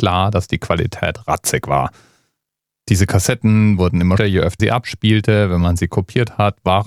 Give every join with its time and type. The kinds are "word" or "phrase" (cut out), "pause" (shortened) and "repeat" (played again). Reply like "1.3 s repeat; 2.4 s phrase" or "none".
4.2 s word; 4.6 s word